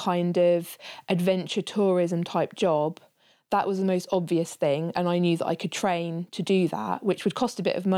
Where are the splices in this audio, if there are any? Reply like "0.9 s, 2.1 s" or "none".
none